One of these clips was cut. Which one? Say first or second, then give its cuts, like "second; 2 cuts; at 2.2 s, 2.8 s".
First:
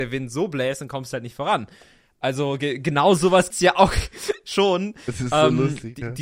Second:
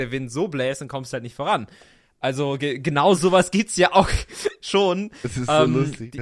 first; 1 cut; at 3.5 s